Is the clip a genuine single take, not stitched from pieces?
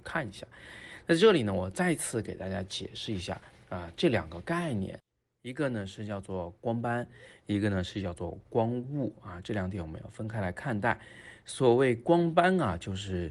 yes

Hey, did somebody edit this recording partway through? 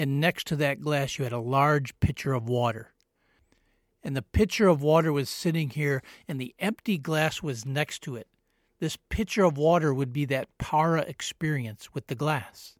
no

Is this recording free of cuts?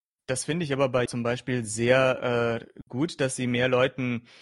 no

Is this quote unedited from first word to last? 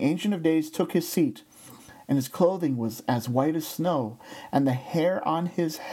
yes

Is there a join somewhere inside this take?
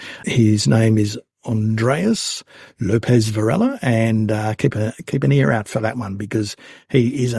no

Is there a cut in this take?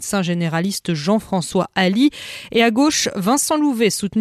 no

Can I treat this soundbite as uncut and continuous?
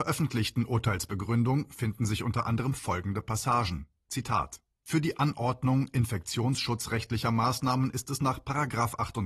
yes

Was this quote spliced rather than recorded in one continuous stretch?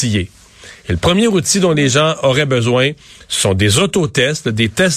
no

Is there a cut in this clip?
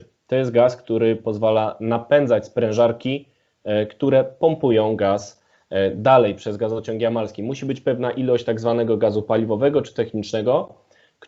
no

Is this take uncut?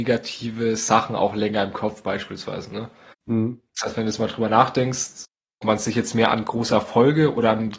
no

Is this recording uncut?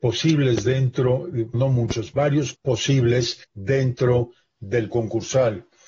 no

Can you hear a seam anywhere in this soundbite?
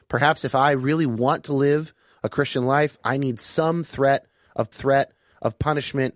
yes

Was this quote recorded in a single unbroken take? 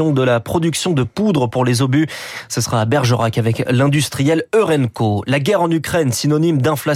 yes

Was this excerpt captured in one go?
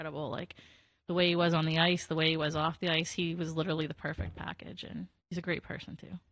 no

